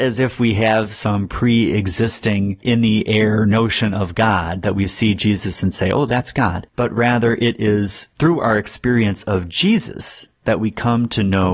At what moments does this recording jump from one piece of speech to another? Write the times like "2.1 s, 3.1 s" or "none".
none